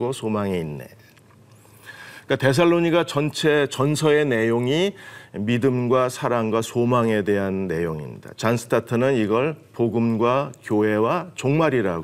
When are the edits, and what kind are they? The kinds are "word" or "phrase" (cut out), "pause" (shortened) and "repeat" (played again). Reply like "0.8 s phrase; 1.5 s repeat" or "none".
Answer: none